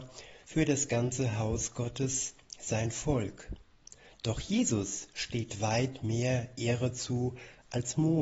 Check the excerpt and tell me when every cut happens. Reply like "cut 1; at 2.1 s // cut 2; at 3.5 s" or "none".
none

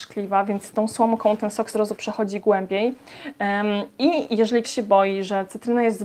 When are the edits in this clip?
cut 1; at 1.7 s // cut 2; at 4.6 s

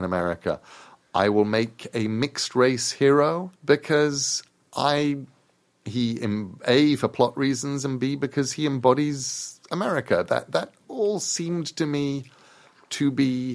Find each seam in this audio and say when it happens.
cut 1; at 3.6 s

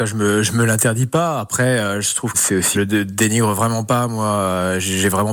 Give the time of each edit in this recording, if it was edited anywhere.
cut 1; at 2.3 s // cut 2; at 2.7 s

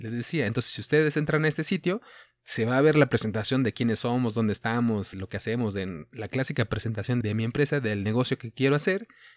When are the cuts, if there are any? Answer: cut 1; at 5.1 s // cut 2; at 7.2 s

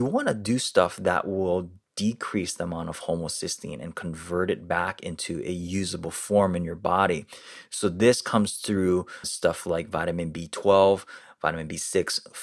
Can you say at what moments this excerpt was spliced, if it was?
cut 1; at 9.2 s

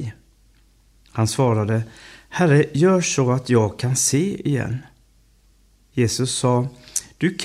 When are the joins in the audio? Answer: none

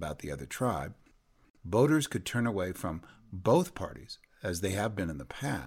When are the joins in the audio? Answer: none

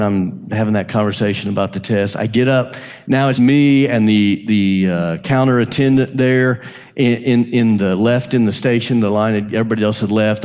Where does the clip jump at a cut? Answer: cut 1; at 3.3 s

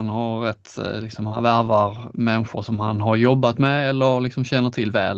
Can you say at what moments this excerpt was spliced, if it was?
none

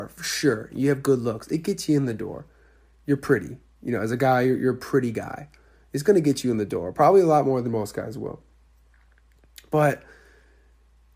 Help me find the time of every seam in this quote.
none

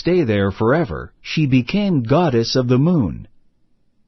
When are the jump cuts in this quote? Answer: cut 1; at 1.2 s

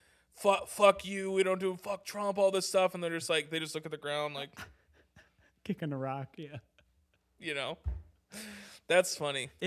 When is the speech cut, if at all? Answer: none

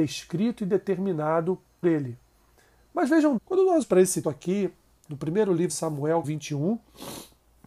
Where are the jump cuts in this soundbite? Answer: cut 1; at 1.8 s // cut 2; at 3.4 s // cut 3; at 3.8 s // cut 4; at 4.2 s // cut 5; at 5.7 s // cut 6; at 6.2 s

